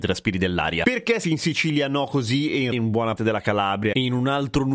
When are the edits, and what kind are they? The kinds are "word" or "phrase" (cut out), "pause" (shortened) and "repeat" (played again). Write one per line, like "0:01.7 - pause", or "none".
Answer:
0:01.2 - word
0:02.7 - word
0:03.2 - word